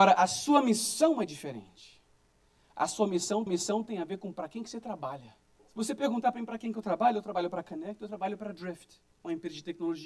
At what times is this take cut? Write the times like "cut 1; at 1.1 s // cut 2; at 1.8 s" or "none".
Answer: cut 1; at 3.5 s // cut 2; at 5.6 s